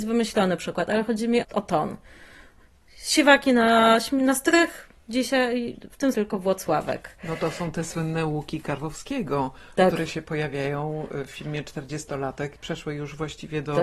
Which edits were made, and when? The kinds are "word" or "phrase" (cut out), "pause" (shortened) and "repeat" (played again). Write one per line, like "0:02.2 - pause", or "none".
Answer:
0:01.4 - word
0:06.1 - word